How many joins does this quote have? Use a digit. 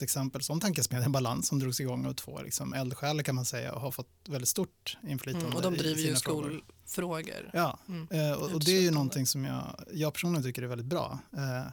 0